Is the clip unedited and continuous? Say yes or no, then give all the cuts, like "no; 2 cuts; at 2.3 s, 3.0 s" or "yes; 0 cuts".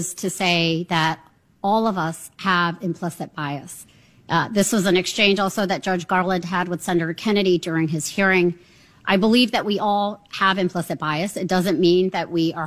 yes; 0 cuts